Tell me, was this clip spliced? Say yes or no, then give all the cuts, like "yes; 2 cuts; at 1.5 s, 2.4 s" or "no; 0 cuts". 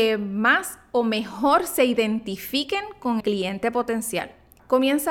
yes; 1 cut; at 3.2 s